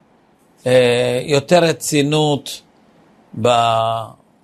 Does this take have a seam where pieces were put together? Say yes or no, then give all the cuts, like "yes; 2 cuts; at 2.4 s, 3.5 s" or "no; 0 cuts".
no; 0 cuts